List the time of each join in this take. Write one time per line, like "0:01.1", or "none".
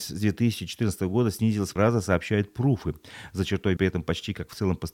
0:01.8
0:03.8